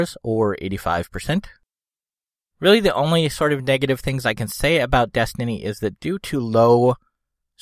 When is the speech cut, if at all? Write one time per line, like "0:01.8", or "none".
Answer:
none